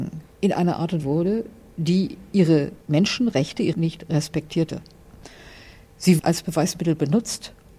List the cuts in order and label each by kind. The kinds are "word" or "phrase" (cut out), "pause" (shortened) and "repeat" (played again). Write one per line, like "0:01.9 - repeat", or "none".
0:01.0 - phrase
0:02.8 - pause
0:03.7 - word
0:06.2 - word